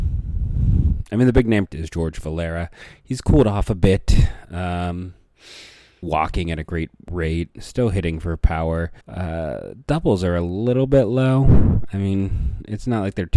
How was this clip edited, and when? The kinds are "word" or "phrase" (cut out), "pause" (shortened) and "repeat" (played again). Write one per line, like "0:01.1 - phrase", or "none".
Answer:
0:01.7 - word
0:06.0 - word
0:09.0 - pause